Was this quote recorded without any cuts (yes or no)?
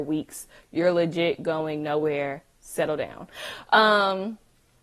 no